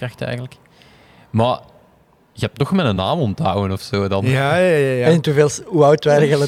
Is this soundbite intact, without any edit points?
yes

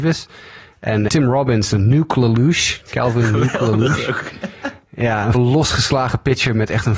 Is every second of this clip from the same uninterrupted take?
no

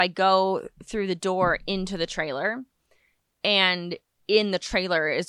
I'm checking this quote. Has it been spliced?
no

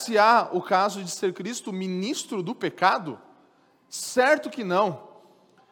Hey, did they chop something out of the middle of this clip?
no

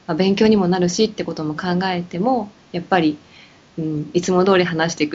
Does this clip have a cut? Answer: no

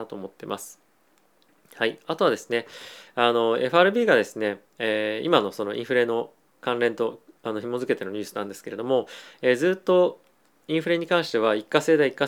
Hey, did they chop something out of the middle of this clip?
yes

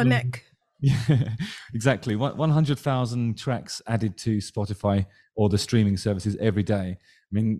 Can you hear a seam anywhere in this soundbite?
no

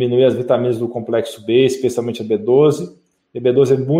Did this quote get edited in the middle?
no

